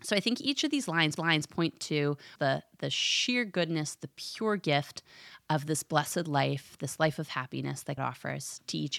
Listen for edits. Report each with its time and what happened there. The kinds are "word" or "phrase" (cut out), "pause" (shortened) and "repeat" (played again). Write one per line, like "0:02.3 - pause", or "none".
0:01.2 - repeat
0:02.4 - phrase
0:08.0 - word

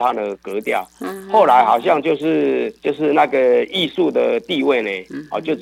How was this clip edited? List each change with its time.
0:02.8 - pause

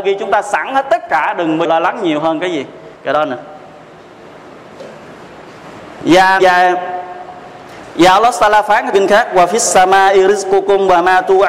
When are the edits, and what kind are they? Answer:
0:01.6 - word
0:03.0 - pause
0:06.4 - word
0:08.9 - word

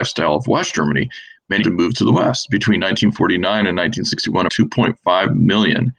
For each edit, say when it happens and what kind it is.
0:01.6 - word
0:04.5 - word

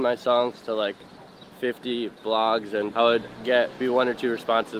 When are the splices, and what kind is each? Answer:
0:01.5 - pause
0:02.9 - word
0:03.8 - word

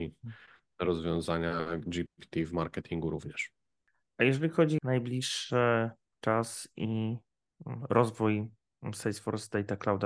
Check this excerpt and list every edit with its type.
0:04.8 - word

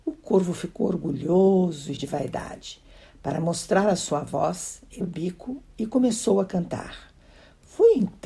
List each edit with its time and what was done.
0:02.0 - word
0:05.0 - word

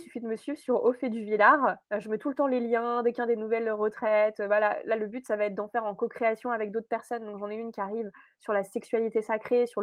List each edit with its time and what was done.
0:01.9 - pause

